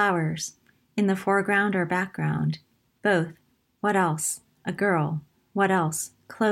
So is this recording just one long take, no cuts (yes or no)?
yes